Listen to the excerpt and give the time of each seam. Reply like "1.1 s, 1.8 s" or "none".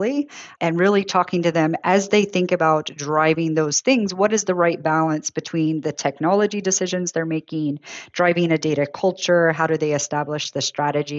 none

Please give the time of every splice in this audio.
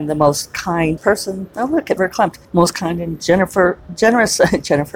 1.0 s, 2.0 s, 2.4 s

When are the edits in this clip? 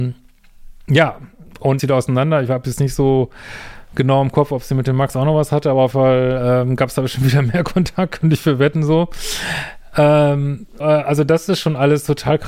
1.8 s, 5.9 s, 10.8 s

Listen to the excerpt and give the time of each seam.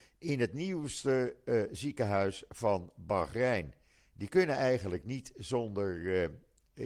none

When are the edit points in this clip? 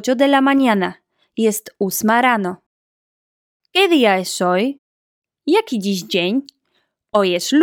none

